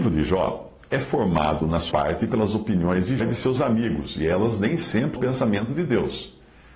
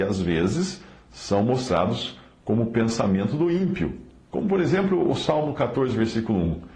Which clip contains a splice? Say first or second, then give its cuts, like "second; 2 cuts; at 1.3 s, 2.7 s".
first; 3 cuts; at 1.9 s, 3.2 s, 5.2 s